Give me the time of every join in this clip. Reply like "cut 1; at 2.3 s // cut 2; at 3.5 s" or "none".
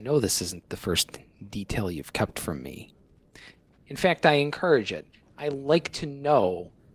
none